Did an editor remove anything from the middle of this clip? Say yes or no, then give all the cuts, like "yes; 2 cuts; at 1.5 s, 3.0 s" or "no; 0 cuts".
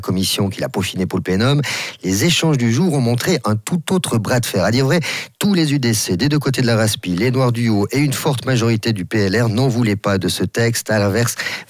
no; 0 cuts